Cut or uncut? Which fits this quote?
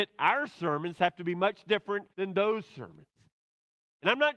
cut